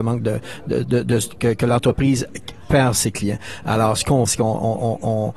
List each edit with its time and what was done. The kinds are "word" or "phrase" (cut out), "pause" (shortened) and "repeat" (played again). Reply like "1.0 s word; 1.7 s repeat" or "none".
4.3 s word